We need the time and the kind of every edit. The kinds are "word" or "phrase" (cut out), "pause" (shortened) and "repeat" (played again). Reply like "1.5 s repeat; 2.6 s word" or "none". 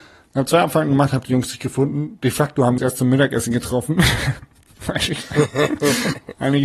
2.8 s word

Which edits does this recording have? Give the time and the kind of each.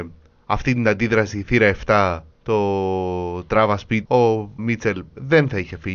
2.3 s pause; 4.0 s word; 4.6 s word

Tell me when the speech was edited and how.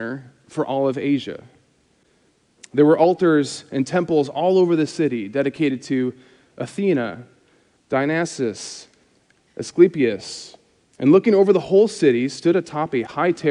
none

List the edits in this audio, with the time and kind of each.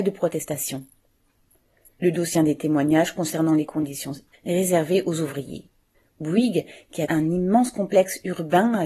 1.9 s pause; 2.3 s phrase; 4.3 s word; 5.9 s pause; 7.1 s word

